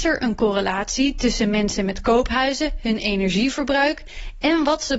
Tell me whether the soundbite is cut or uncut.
uncut